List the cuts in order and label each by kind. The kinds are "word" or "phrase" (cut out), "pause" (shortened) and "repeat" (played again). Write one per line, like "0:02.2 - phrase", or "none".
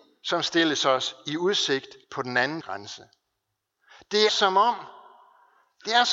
0:02.0 - pause
0:02.6 - phrase
0:04.3 - word